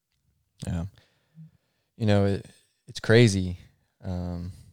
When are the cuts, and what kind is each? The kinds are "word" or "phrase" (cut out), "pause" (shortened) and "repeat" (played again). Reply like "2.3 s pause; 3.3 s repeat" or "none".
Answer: none